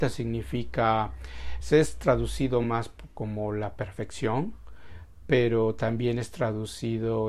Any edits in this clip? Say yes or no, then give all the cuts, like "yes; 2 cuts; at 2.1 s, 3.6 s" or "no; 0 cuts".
no; 0 cuts